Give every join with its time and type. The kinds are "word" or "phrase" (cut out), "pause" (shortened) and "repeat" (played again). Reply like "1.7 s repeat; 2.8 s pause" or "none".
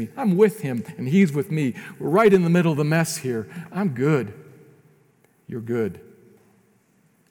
none

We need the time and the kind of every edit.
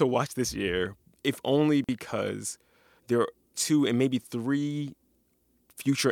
3.5 s word

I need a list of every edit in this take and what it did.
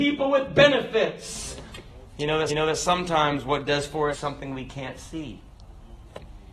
2.5 s repeat; 3.7 s word; 4.1 s phrase

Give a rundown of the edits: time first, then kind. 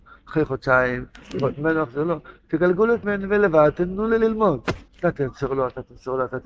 3.0 s word; 4.9 s pause

